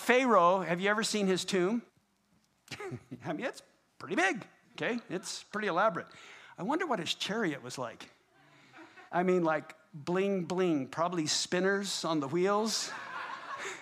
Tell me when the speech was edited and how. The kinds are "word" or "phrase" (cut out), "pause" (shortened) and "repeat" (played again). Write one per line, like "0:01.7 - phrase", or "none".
0:01.9 - pause
0:03.9 - pause
0:04.6 - pause
0:09.1 - pause